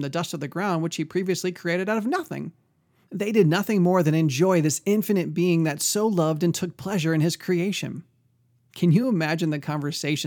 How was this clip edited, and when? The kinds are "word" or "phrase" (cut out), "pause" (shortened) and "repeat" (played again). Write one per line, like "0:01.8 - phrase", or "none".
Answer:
none